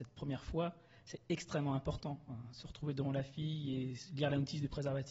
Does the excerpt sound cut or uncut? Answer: uncut